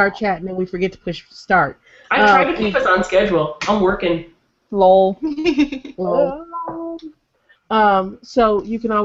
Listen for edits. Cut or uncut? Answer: uncut